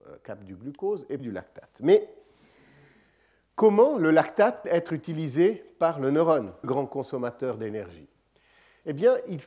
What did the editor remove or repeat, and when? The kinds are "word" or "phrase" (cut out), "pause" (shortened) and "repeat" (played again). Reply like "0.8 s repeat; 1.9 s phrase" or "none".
1.2 s word; 4.6 s word; 6.6 s word

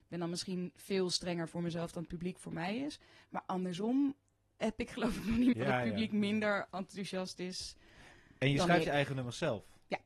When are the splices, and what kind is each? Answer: 5.5 s word

